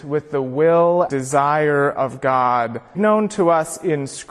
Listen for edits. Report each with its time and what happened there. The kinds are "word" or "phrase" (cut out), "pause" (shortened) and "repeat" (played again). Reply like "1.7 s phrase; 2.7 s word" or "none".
1.1 s word; 2.9 s word